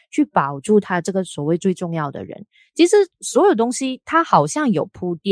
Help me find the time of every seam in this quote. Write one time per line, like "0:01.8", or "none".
none